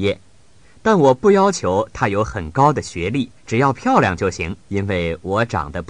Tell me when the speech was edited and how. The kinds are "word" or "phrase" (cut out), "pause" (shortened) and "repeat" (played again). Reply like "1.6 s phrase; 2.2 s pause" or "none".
3.4 s pause; 4.6 s pause